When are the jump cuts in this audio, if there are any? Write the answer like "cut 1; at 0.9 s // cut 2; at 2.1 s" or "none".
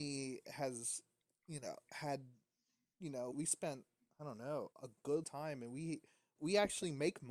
cut 1; at 3.3 s // cut 2; at 4.7 s // cut 3; at 5.2 s // cut 4; at 6.4 s